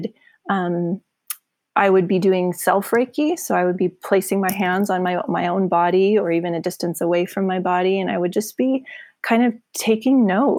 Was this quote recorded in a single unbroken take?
yes; 0 cuts

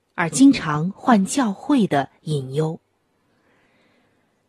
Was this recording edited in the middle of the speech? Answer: no; 0 cuts

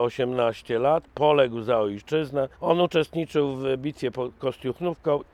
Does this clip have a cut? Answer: yes; 1 cut; at 2.5 s

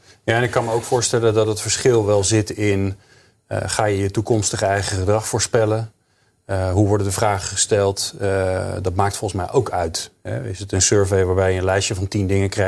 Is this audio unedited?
yes; 0 cuts

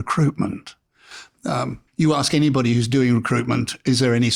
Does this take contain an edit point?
yes; 1 cut; at 1.9 s

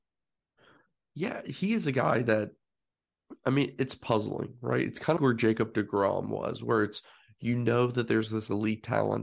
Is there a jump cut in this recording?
yes; 1 cut; at 5.2 s

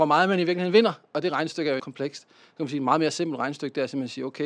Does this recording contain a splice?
yes; 1 cut; at 1.8 s

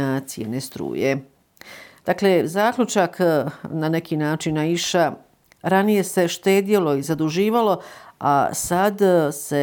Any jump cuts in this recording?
no; 0 cuts

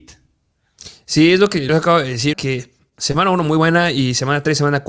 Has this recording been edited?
yes; 2 cuts; at 1.7 s, 2.3 s

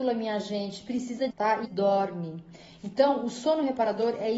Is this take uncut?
no; 2 cuts; at 1.3 s, 1.6 s

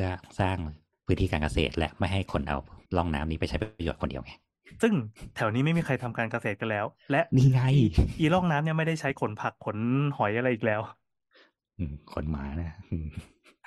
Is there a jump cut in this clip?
yes; 2 cuts; at 0.9 s, 2.8 s

